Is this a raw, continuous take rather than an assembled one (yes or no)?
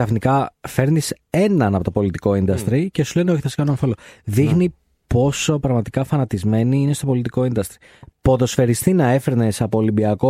yes